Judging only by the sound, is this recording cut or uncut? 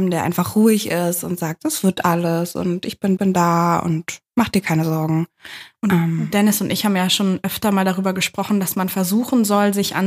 cut